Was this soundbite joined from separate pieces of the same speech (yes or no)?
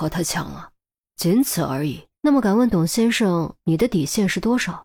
yes